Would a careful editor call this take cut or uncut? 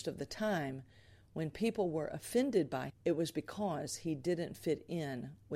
cut